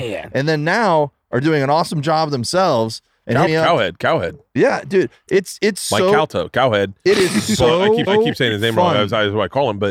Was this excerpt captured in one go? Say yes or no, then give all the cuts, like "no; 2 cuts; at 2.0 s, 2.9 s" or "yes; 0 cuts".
no; 2 cuts; at 3.5 s, 8.1 s